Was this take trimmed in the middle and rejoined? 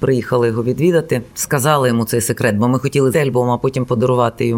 yes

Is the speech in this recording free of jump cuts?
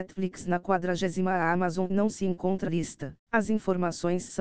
no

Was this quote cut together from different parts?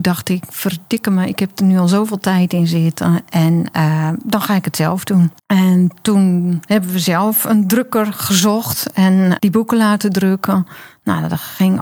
yes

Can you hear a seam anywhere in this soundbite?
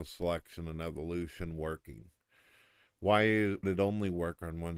yes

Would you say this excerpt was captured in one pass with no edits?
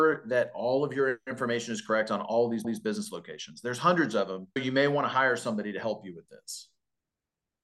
no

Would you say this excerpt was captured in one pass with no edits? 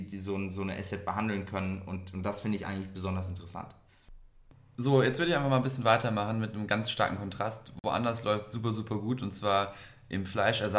yes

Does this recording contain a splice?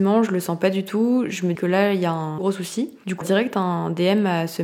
yes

